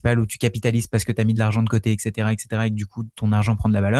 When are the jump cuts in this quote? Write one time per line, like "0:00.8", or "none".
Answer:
none

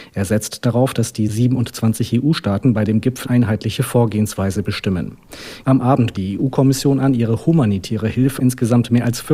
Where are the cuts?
0:03.2
0:06.1
0:08.4

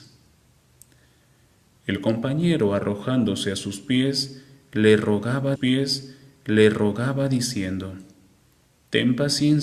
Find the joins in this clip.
0:05.6

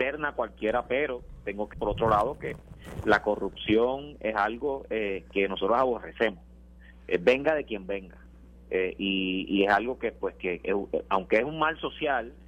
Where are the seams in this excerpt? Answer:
0:01.7

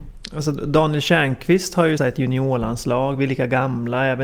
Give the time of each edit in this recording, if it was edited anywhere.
0:02.0

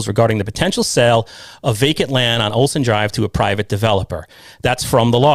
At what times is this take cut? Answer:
none

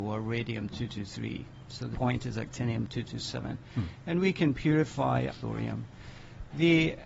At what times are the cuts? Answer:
0:01.9
0:05.3

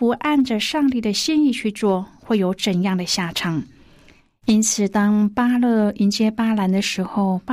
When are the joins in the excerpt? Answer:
none

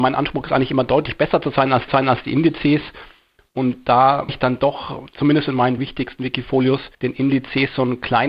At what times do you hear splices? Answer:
0:01.9
0:04.3
0:05.8
0:06.9

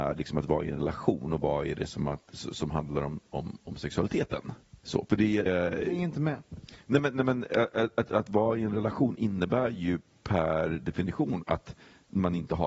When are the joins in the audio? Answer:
0:04.8
0:05.5

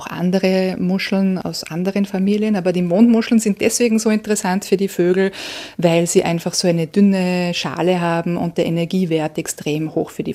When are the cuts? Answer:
none

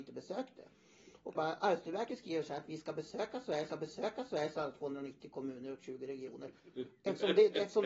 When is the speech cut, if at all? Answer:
0:01.3
0:03.7

